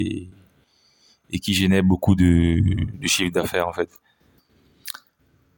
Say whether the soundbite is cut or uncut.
uncut